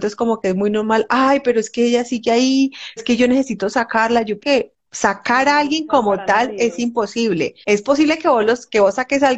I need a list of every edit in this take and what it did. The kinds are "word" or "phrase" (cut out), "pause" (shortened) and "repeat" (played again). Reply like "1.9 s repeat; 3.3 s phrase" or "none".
3.0 s word; 4.4 s word; 4.9 s pause; 7.6 s pause